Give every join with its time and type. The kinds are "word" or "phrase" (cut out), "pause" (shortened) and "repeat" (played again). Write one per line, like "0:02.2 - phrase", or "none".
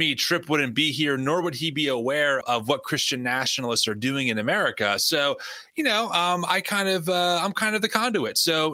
0:02.4 - word